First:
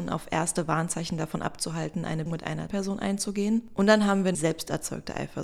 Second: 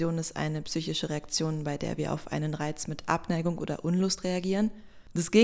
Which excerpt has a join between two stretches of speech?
first; 3 cuts; at 2.3 s, 2.7 s, 4.3 s

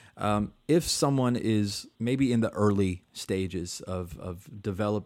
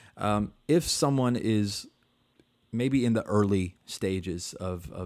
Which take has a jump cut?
first; 1 cut; at 1.9 s

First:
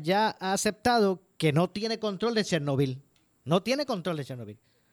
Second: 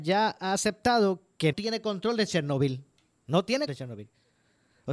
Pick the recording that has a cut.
second; 2 cuts; at 1.5 s, 3.7 s

